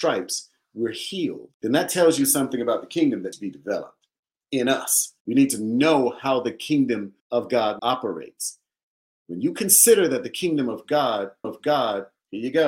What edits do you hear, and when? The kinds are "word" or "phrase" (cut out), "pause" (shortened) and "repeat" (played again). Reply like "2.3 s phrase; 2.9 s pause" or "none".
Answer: 1.5 s pause; 3.3 s word; 5.2 s pause; 7.2 s pause; 7.8 s word; 11.4 s repeat

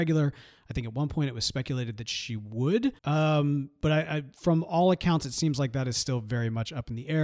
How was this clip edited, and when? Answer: 3.0 s pause

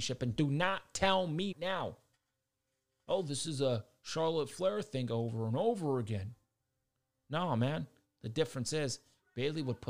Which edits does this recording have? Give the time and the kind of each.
1.5 s word

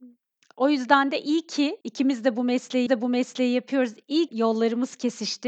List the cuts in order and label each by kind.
1.8 s pause; 2.9 s repeat; 4.3 s phrase

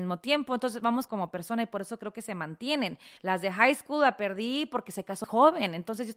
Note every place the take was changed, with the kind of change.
1.1 s word; 3.2 s pause; 5.2 s word

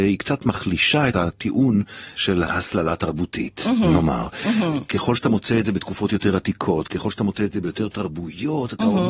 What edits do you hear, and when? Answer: none

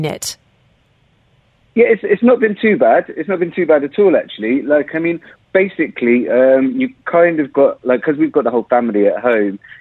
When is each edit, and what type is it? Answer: none

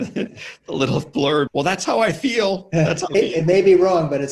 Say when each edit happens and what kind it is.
1.5 s word; 3.1 s word

